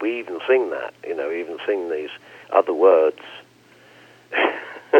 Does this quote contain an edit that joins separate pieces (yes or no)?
yes